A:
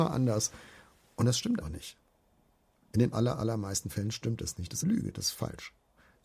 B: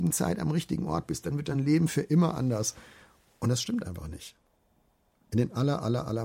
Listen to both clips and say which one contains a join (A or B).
A